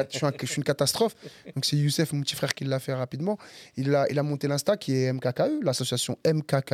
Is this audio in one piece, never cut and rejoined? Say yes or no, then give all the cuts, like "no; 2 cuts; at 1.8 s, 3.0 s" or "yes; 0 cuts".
yes; 0 cuts